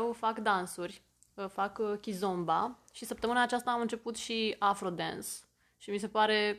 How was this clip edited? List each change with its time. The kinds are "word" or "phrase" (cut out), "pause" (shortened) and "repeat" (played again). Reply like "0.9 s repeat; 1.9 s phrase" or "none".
none

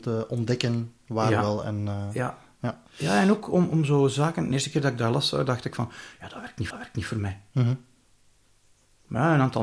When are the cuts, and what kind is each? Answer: 2.9 s pause; 6.7 s repeat

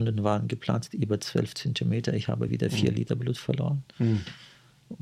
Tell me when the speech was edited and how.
none

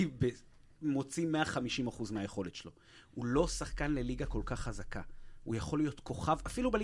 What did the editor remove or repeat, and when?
none

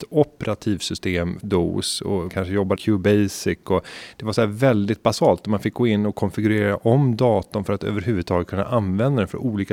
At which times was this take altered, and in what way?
1.4 s word; 2.3 s word; 2.8 s word

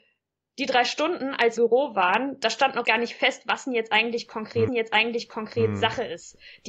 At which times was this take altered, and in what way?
1.6 s phrase; 2.8 s word; 4.7 s repeat

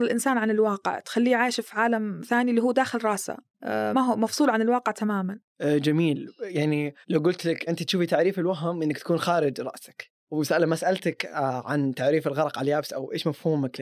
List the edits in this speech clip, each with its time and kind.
3.9 s word; 7.0 s pause; 7.7 s word

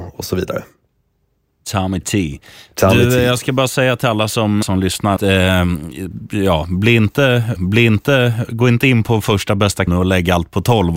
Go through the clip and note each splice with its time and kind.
4.6 s word; 5.2 s word; 7.6 s repeat; 9.9 s word

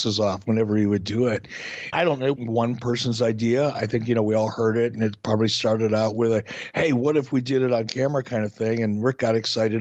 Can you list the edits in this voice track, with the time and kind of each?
1.9 s word; 2.4 s word

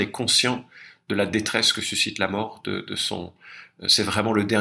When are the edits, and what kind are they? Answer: none

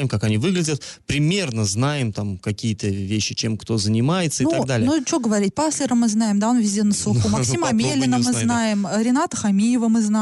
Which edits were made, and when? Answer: none

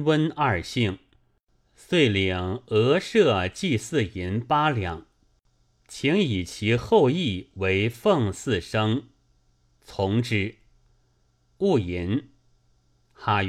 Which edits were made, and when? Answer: none

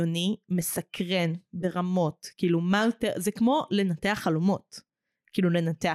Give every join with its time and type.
none

